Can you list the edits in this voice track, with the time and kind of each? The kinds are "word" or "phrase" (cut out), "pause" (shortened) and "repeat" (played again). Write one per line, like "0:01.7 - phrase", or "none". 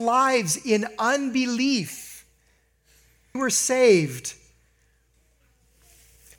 0:03.3 - phrase